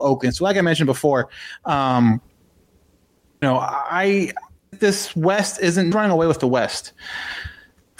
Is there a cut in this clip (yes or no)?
yes